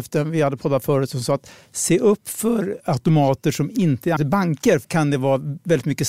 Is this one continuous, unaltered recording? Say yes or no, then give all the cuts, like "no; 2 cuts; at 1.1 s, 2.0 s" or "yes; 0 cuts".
no; 2 cuts; at 4.2 s, 4.8 s